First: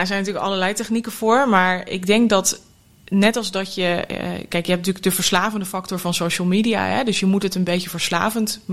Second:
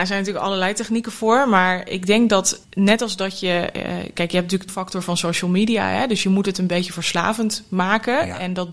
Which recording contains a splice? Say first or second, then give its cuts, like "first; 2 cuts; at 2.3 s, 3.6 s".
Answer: second; 2 cuts; at 2.6 s, 4.7 s